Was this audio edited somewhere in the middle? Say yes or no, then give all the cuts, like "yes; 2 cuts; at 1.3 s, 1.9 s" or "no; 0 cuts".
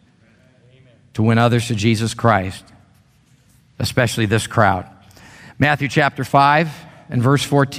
no; 0 cuts